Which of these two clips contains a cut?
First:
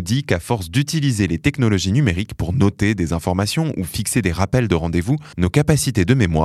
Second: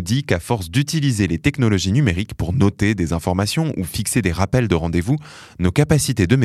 first; 1 cut; at 5.3 s

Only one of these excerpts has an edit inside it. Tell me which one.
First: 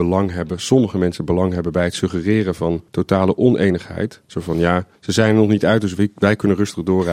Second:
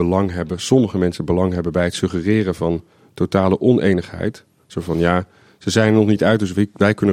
first; 3 cuts; at 2.9 s, 4.2 s, 5.0 s

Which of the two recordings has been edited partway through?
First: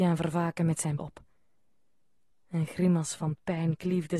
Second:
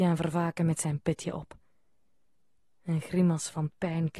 first; 1 cut; at 1.0 s

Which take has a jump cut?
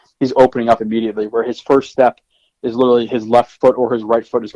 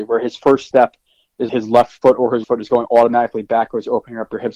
second; 2 cuts; at 1.5 s, 2.4 s

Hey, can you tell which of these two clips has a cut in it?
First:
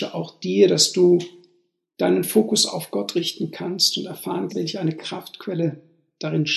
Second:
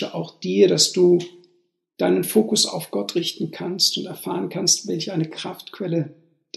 first; 1 cut; at 4.5 s

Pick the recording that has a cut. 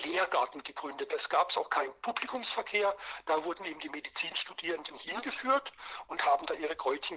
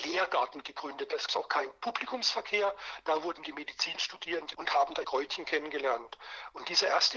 second; 4 cuts; at 1.3 s, 3.4 s, 4.5 s, 5.0 s

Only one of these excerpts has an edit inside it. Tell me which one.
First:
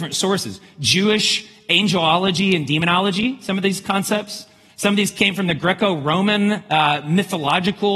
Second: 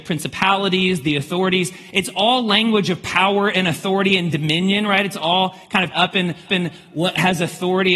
second; 2 cuts; at 5.9 s, 6.5 s

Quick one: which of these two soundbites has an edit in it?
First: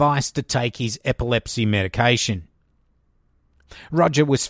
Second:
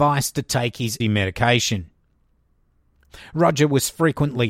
second; 1 cut; at 1.0 s

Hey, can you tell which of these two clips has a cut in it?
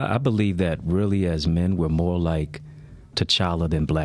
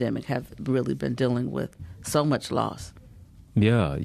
first; 1 cut; at 3.1 s

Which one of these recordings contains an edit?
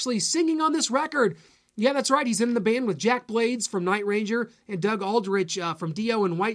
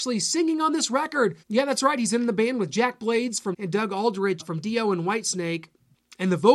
second; 3 cuts; at 1.4 s, 3.5 s, 4.4 s

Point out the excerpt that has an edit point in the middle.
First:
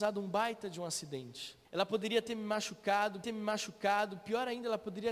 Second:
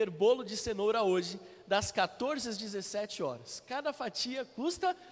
first; 2 cuts; at 1.6 s, 3.2 s

